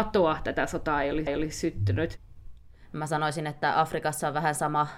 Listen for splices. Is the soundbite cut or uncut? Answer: cut